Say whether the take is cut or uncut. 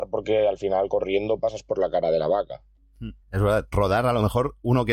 cut